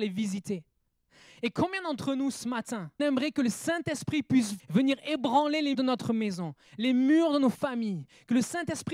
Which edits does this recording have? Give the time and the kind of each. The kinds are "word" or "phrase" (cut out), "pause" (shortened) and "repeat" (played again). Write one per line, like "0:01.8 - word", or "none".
0:03.0 - word
0:04.6 - word
0:05.7 - word

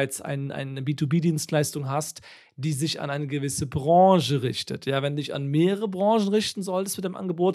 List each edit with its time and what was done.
none

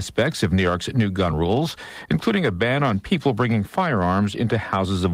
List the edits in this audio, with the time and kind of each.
none

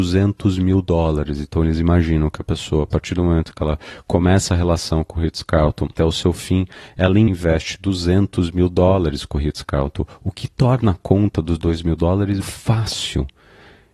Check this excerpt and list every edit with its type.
0:06.0 - word
0:07.3 - word
0:12.4 - word

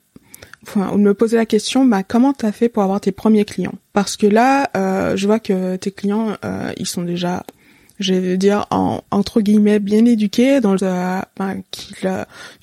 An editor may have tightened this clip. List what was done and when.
0:03.9 - pause
0:07.8 - pause
0:10.8 - word

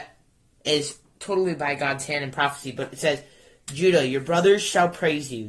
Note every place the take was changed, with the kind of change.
none

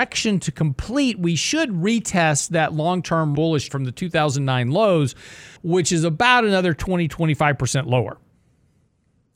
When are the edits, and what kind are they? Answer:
0:03.4 - word
0:03.7 - phrase
0:05.6 - pause

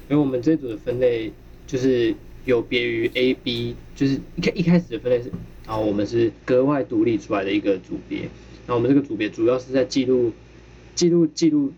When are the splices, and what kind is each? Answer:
0:05.3 - phrase
0:06.4 - pause

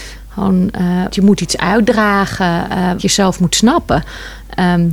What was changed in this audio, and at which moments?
0:01.1 - word
0:03.0 - word

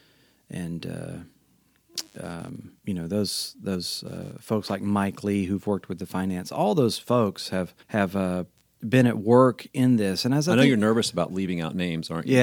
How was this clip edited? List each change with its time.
0:02.8 - pause
0:07.8 - pause

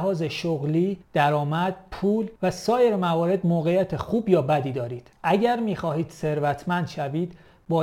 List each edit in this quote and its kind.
0:01.0 - pause
0:02.4 - pause
0:05.1 - pause

